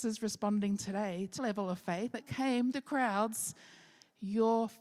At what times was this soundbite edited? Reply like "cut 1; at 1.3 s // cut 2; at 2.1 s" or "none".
cut 1; at 1.4 s // cut 2; at 2.1 s // cut 3; at 2.7 s

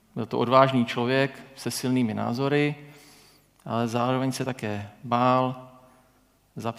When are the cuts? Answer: none

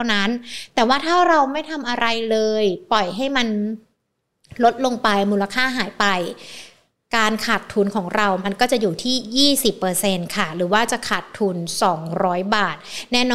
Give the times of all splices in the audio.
none

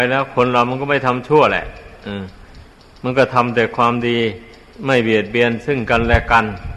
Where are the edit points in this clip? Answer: cut 1; at 2.9 s // cut 2; at 4.7 s

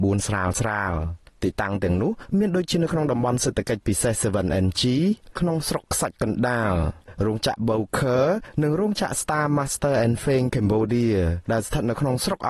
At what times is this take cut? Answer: none

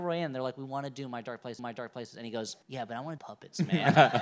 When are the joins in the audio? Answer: cut 1; at 1.6 s // cut 2; at 2.6 s // cut 3; at 3.2 s

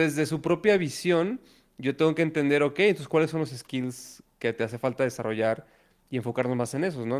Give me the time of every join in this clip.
none

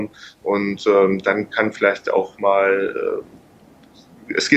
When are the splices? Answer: none

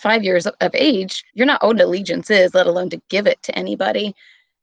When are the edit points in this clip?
cut 1; at 1.3 s // cut 2; at 1.8 s

